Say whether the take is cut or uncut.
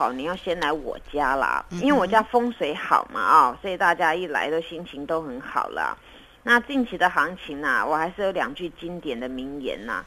uncut